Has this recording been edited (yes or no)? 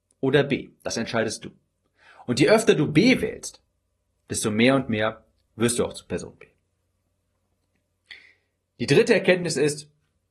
no